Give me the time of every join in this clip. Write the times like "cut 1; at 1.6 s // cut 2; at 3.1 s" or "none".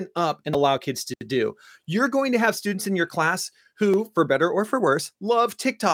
none